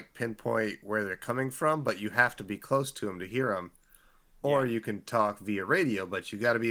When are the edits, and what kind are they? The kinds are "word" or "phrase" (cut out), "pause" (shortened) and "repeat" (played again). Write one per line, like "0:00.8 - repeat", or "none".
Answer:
none

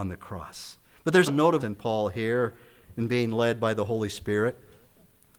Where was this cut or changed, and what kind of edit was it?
0:01.3 - word
0:01.6 - word

